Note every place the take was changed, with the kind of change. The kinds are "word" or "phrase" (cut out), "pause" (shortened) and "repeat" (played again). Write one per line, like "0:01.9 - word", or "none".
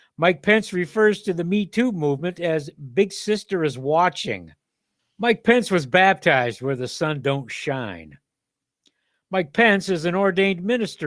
0:05.0 - pause